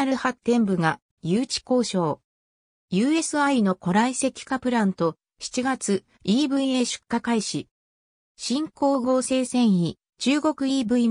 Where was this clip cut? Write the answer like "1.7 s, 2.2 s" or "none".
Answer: none